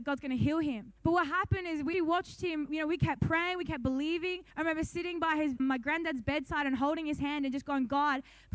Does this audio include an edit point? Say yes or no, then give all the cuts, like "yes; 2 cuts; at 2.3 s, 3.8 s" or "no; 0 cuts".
yes; 4 cuts; at 1.0 s, 1.9 s, 4.5 s, 5.6 s